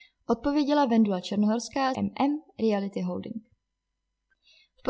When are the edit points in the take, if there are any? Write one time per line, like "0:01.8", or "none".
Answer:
0:01.9